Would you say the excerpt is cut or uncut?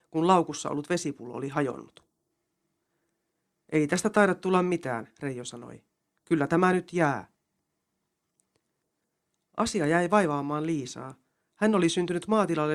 uncut